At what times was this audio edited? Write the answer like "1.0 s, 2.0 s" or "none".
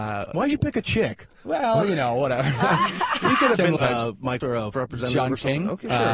3.8 s, 4.4 s, 4.7 s